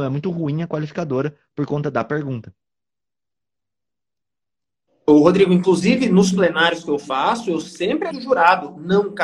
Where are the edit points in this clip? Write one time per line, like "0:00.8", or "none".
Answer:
0:08.1